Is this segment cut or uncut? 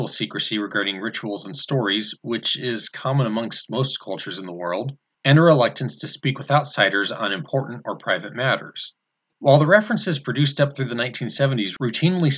uncut